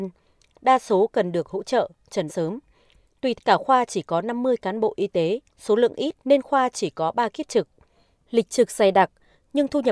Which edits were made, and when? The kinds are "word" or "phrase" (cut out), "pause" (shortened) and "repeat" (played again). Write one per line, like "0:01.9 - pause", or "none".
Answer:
0:02.3 - word
0:03.4 - word
0:05.5 - pause
0:06.2 - pause